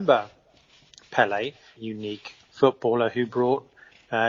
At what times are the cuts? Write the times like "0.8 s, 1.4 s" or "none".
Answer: 1.8 s, 2.4 s